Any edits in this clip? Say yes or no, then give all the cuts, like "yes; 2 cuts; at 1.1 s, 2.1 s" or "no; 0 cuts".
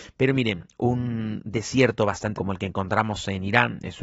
yes; 1 cut; at 2.3 s